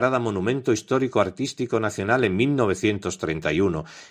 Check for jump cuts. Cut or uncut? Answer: uncut